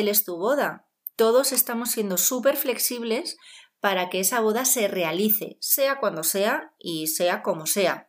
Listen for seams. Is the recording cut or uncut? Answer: uncut